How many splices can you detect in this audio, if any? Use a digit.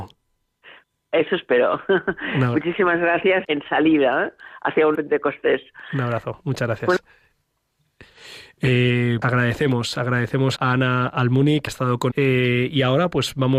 6